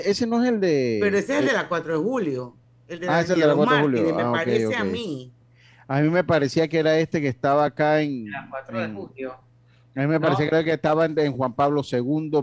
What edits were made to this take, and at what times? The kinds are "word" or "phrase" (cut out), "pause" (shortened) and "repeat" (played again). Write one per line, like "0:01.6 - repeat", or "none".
none